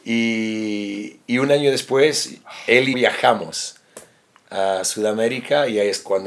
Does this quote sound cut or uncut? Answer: cut